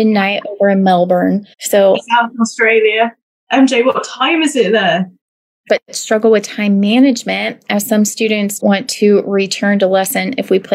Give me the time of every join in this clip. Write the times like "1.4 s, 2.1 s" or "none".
1.5 s, 2.0 s, 5.7 s, 8.6 s

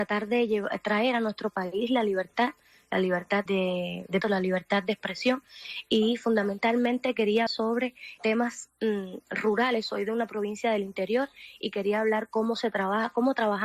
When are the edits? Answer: 3.5 s, 4.2 s, 7.5 s, 8.2 s

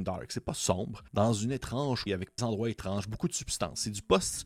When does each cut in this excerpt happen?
1.1 s, 2.1 s, 2.4 s

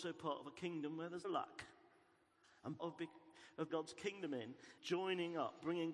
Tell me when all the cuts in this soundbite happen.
1.2 s, 2.8 s, 3.7 s, 4.8 s

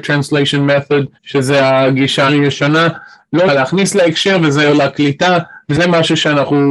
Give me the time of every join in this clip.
1.2 s, 2.3 s, 3.5 s, 4.7 s

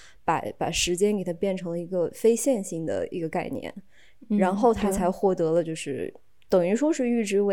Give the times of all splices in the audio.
none

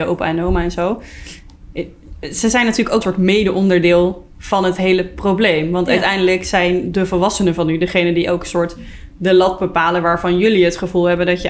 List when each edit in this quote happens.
3.0 s

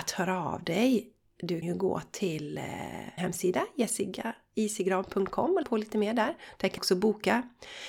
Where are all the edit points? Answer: 1.6 s, 3.2 s, 5.6 s, 6.8 s

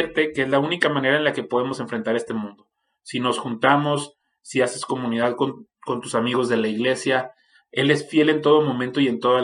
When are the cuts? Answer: none

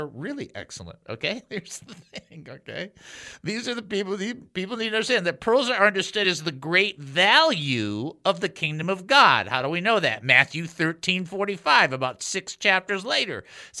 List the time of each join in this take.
none

